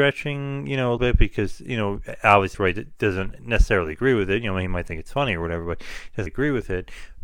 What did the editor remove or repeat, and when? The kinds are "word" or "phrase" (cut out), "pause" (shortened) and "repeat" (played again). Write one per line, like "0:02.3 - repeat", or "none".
0:01.0 - word
0:02.5 - word
0:06.3 - word